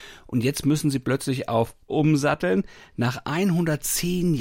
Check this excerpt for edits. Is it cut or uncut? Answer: cut